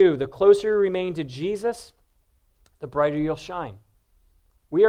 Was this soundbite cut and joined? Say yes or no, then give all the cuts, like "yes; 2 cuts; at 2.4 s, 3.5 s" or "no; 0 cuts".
no; 0 cuts